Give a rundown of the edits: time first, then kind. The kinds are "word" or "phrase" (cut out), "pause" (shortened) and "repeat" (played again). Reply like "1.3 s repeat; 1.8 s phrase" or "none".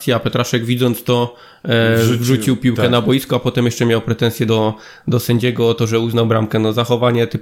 none